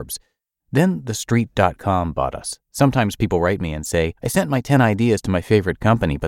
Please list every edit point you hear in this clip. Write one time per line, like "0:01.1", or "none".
0:02.6
0:04.2